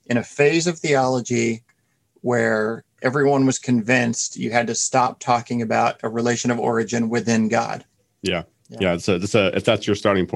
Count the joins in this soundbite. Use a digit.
1